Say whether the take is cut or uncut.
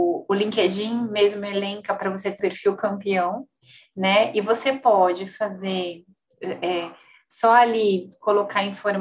cut